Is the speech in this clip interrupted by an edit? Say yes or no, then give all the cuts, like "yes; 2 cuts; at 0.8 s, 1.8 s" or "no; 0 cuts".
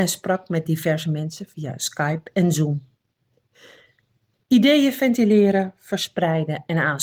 no; 0 cuts